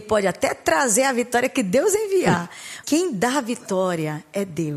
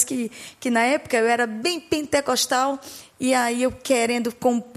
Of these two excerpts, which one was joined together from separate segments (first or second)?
first